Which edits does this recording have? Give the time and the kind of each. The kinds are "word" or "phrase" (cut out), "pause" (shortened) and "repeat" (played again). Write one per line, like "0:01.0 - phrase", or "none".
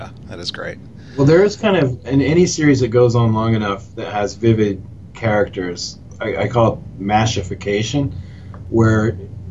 none